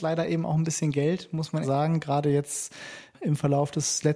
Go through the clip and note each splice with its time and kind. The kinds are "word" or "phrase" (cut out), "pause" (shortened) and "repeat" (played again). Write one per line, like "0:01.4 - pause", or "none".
0:01.6 - word